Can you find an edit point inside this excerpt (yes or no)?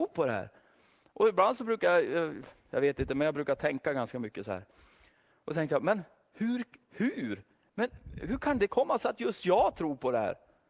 no